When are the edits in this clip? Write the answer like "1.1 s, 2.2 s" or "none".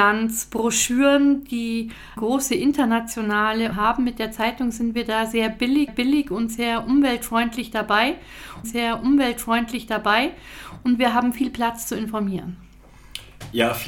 2.2 s, 3.7 s, 5.9 s, 8.6 s